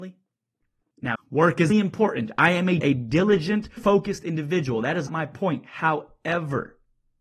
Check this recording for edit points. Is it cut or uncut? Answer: cut